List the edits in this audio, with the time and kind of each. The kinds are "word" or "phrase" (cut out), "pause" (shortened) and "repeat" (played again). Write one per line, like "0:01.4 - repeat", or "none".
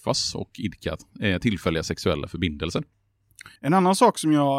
0:03.6 - pause